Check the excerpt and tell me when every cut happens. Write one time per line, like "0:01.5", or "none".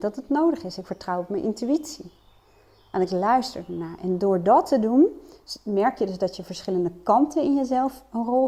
none